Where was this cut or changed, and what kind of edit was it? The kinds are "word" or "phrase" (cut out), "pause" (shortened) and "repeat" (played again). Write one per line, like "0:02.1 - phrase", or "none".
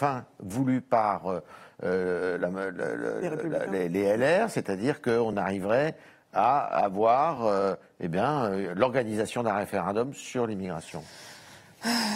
none